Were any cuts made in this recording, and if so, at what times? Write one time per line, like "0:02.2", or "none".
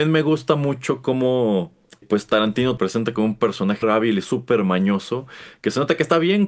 0:02.0
0:02.8
0:03.8